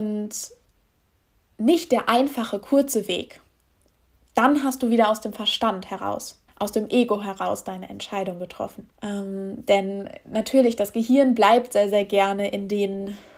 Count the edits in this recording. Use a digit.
2